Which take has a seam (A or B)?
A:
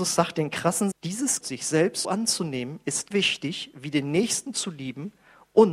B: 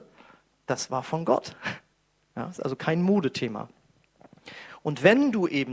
A